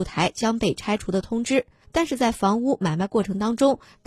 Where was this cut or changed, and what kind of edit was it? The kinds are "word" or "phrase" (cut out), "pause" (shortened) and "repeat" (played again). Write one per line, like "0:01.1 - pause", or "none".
none